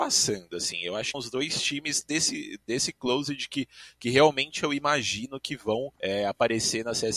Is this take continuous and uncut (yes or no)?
no